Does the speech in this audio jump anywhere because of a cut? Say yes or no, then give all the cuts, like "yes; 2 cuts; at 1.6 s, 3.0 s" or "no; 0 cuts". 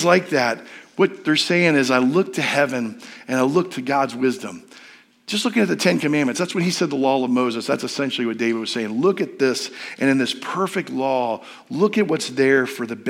no; 0 cuts